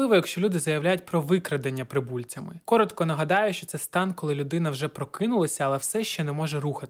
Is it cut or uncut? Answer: uncut